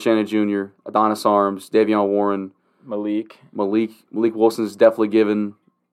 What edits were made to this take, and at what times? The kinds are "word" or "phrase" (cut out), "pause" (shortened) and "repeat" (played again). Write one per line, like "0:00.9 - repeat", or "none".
none